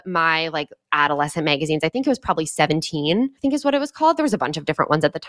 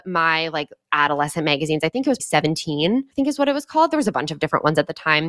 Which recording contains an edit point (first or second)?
second